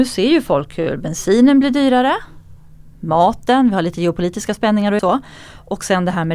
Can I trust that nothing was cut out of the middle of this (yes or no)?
no